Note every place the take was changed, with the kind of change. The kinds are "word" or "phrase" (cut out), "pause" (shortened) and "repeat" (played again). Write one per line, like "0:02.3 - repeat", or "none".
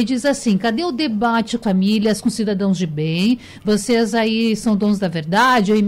0:01.6 - word